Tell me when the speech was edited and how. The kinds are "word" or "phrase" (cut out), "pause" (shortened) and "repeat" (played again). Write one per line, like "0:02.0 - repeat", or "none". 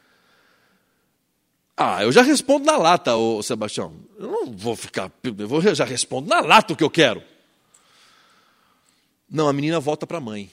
none